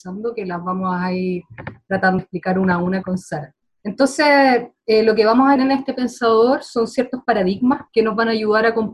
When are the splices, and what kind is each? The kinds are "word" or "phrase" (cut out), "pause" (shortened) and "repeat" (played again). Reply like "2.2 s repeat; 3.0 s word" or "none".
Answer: 2.2 s word; 3.0 s word; 3.6 s pause; 5.6 s word; 7.9 s pause